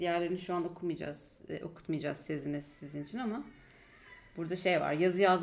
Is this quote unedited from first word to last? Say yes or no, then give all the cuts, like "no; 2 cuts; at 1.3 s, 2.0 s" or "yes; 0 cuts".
yes; 0 cuts